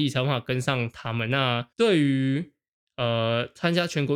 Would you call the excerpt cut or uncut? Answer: cut